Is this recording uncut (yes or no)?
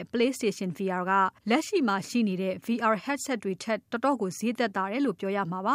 no